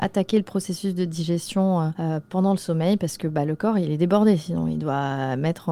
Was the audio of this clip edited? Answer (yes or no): no